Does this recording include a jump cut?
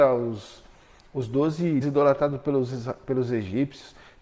yes; 1 cut; at 1.8 s

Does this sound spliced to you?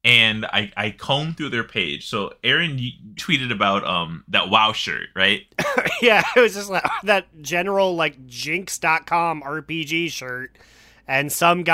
yes; 2 cuts; at 3.2 s, 5.5 s

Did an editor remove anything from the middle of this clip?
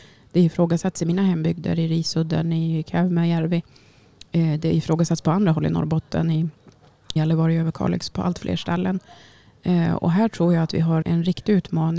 yes; 2 cuts; at 7.2 s, 11.0 s

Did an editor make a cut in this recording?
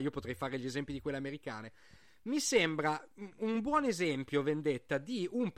no; 0 cuts

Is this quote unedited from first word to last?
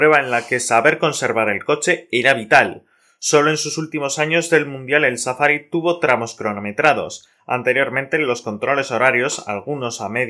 yes; 0 cuts

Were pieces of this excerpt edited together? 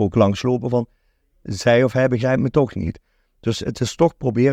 no; 0 cuts

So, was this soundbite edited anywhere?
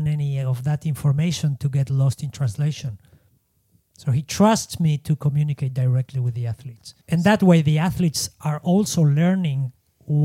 yes; 1 cut; at 7.0 s

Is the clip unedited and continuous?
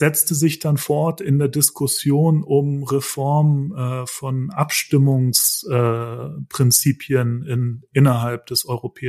yes; 0 cuts

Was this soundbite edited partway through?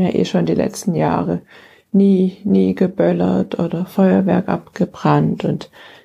no; 0 cuts

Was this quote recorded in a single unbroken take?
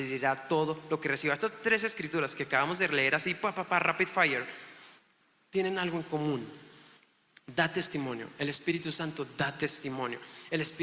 yes; 0 cuts

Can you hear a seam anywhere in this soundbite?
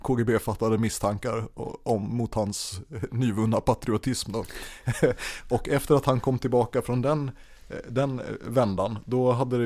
no; 0 cuts

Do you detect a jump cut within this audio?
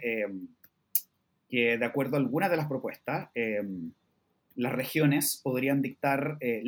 no; 0 cuts

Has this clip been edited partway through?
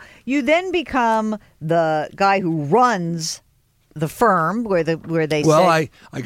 no; 0 cuts

